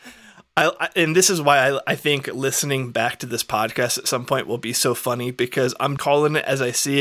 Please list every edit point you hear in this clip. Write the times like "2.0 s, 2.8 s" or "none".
6.0 s